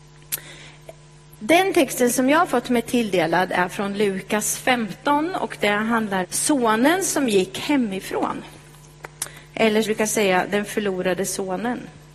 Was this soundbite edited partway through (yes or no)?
yes